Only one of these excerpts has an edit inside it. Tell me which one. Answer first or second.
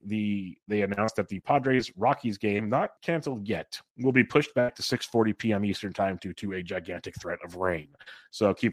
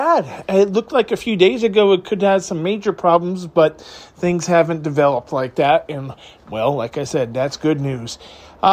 first